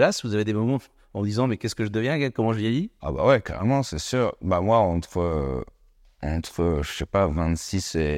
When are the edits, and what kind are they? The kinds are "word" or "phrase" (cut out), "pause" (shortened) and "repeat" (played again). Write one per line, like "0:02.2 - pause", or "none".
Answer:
none